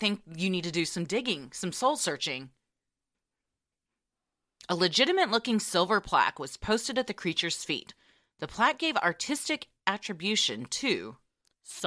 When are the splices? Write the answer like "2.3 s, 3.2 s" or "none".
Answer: none